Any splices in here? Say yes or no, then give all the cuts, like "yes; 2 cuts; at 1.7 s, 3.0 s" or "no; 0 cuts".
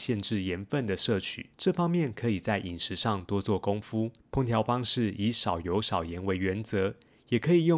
yes; 2 cuts; at 1.5 s, 4.2 s